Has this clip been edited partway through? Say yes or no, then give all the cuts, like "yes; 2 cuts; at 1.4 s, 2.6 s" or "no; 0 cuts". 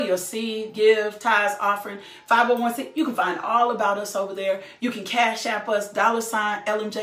no; 0 cuts